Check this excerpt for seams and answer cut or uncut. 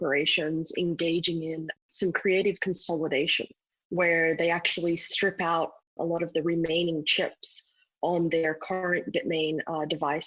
uncut